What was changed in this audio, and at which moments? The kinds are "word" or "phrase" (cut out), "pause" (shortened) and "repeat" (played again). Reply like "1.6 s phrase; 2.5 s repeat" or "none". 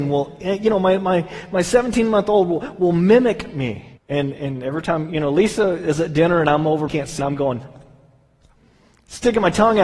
4.0 s pause; 6.9 s phrase; 7.2 s phrase